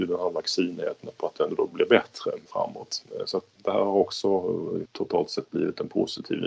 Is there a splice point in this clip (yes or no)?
yes